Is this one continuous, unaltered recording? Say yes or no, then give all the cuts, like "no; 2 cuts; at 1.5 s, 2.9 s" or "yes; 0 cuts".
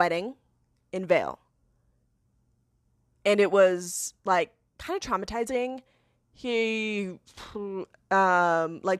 yes; 0 cuts